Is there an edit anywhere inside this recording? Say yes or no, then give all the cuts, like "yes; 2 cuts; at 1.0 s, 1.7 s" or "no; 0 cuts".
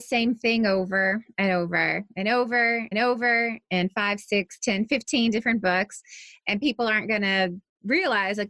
yes; 1 cut; at 2.9 s